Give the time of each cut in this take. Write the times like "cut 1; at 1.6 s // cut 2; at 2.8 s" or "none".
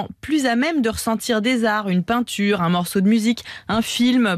none